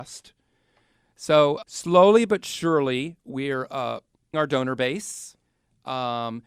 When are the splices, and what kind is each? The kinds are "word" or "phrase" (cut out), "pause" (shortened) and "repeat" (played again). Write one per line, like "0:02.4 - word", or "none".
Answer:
0:01.6 - word
0:03.2 - word
0:04.3 - word